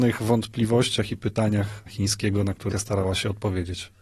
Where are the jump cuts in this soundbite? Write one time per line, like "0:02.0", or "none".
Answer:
0:01.9
0:02.7